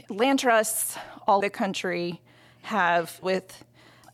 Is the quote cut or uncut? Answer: cut